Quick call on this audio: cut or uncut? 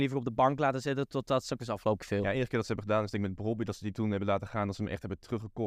cut